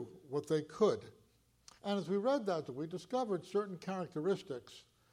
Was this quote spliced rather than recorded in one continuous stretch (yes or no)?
yes